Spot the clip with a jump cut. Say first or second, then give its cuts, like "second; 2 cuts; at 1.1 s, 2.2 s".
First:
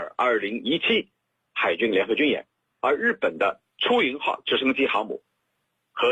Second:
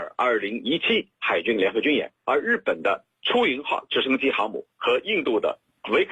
second; 3 cuts; at 1.1 s, 2.2 s, 4.7 s